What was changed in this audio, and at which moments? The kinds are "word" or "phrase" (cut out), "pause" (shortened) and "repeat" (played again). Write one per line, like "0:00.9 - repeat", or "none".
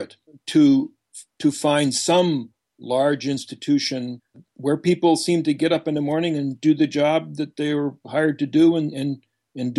none